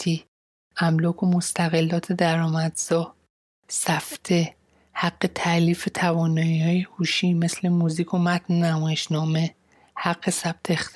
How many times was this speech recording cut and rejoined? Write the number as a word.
zero